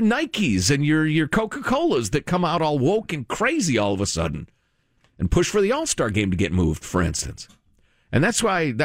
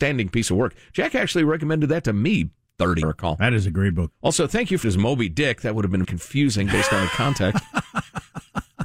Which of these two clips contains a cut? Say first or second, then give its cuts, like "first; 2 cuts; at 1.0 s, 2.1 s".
second; 4 cuts; at 3.0 s, 4.1 s, 4.8 s, 6.0 s